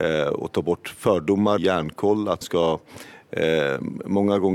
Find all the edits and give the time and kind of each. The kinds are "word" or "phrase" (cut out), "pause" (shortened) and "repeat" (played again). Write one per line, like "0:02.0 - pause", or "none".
0:01.6 - phrase
0:02.4 - word